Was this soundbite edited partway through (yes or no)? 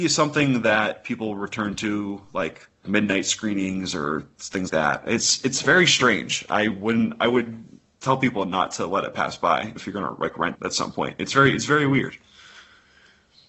yes